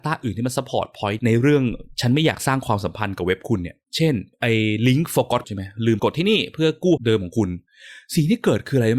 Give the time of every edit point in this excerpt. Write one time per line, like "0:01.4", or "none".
0:04.3
0:05.4
0:06.0
0:07.0